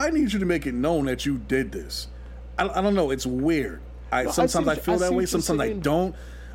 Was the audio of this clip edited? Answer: no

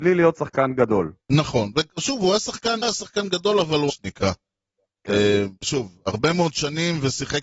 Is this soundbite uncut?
no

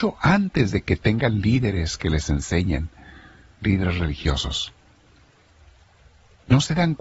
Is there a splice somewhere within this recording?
no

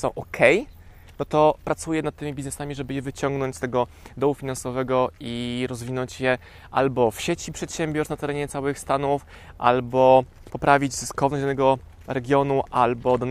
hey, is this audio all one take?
yes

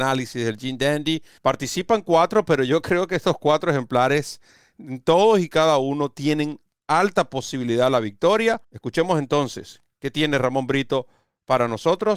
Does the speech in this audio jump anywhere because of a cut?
yes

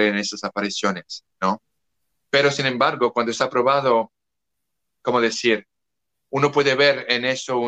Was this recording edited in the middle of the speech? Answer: no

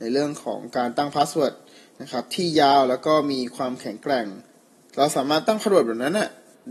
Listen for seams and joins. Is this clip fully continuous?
yes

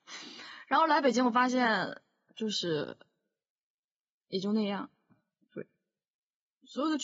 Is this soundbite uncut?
yes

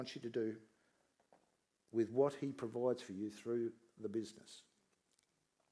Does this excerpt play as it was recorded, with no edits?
yes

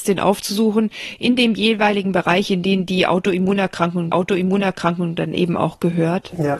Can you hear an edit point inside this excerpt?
yes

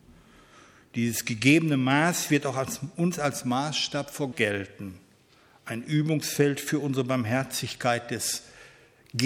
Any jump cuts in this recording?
yes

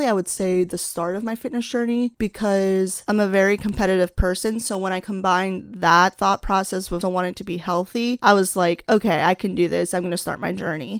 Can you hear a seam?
yes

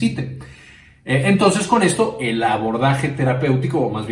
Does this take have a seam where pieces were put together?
no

